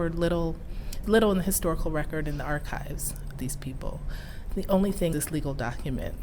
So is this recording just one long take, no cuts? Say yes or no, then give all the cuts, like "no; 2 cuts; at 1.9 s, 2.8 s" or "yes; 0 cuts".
no; 3 cuts; at 1.0 s, 3.3 s, 5.1 s